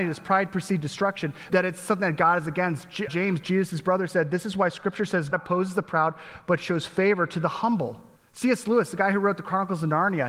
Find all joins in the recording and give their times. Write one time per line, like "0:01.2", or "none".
0:01.5
0:03.1
0:05.3
0:08.2